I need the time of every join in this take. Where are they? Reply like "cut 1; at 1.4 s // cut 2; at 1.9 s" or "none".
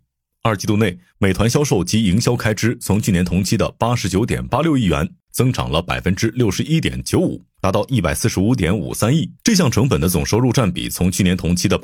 cut 1; at 9.4 s